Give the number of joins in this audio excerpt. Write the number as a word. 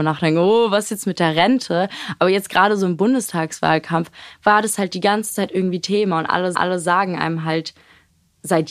one